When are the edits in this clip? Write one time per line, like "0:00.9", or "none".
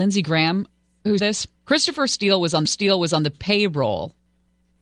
0:01.2
0:01.6
0:02.7